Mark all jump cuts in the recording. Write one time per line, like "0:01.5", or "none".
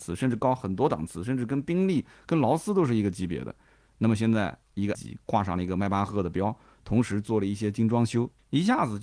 0:04.9